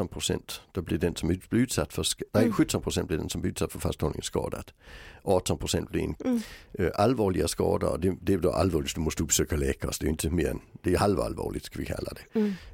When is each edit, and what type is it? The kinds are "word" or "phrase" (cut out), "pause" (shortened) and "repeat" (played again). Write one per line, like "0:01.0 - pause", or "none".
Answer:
0:02.3 - word
0:06.2 - word